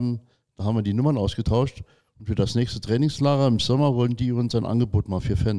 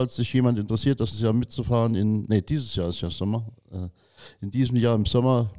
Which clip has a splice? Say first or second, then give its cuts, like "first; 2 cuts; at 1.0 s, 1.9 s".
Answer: second; 1 cut; at 1.1 s